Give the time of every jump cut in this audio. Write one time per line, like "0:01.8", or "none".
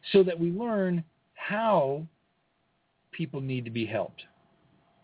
none